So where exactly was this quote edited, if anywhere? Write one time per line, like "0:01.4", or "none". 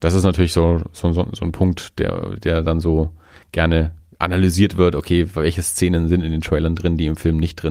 none